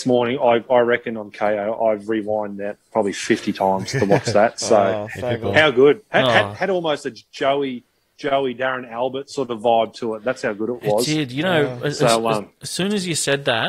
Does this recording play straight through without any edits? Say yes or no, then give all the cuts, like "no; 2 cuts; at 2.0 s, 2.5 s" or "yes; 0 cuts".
yes; 0 cuts